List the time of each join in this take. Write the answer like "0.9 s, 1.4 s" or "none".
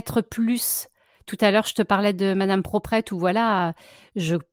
none